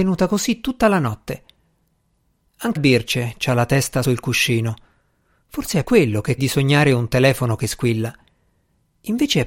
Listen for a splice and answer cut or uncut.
cut